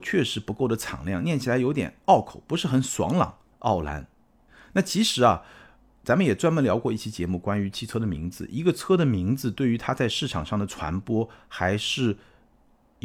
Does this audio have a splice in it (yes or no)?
no